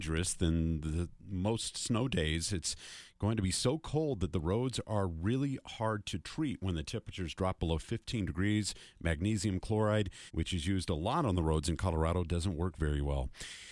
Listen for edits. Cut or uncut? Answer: cut